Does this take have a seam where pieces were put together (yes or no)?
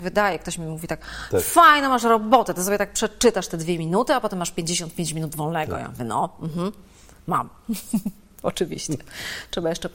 no